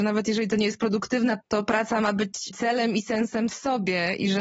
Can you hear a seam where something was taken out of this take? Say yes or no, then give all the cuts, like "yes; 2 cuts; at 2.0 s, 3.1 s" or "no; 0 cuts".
yes; 2 cuts; at 1.4 s, 3.5 s